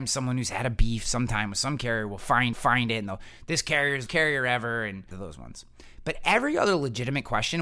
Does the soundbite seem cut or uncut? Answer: cut